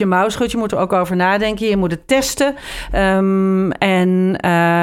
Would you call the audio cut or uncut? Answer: uncut